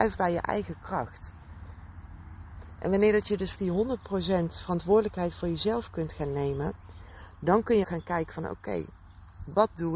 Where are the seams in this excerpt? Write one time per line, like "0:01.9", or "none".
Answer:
0:03.5
0:07.8